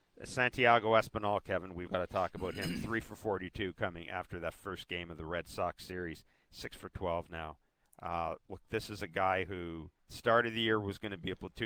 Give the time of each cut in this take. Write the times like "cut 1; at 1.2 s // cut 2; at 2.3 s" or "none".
cut 1; at 1.9 s // cut 2; at 10.0 s